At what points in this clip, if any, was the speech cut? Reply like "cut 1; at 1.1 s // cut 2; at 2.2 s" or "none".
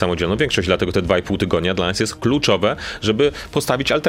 none